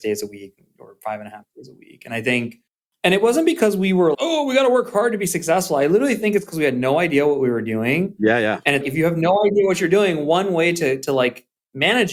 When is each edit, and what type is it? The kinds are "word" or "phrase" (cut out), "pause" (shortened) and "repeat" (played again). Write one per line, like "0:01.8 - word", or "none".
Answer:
0:04.1 - word
0:08.8 - word